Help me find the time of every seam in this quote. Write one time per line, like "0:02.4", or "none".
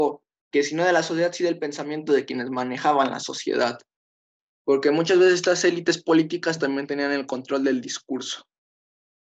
none